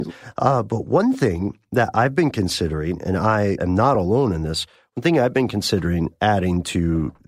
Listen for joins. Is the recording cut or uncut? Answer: uncut